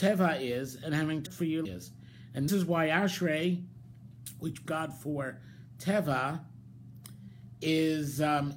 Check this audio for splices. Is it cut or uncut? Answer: cut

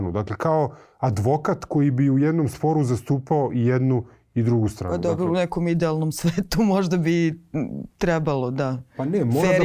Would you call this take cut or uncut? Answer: uncut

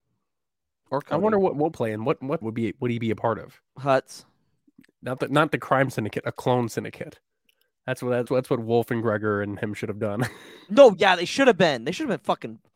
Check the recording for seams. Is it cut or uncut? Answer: cut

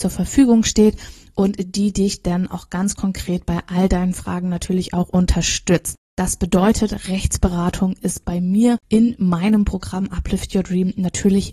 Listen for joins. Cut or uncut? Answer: uncut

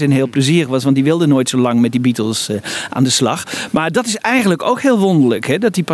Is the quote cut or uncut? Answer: uncut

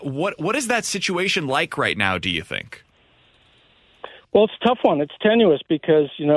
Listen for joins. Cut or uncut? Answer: uncut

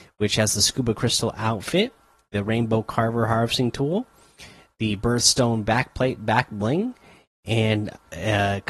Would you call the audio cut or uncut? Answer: uncut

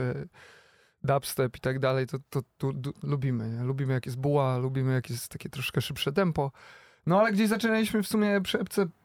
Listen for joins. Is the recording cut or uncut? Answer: uncut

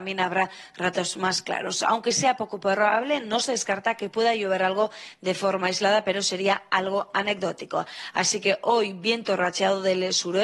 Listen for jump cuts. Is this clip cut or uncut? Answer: uncut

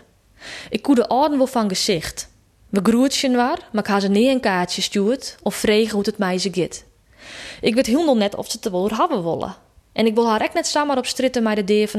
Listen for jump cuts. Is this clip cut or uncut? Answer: uncut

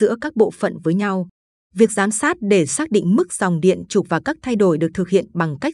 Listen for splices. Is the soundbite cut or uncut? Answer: uncut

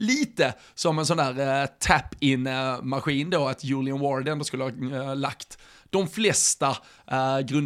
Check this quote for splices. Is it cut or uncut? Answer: uncut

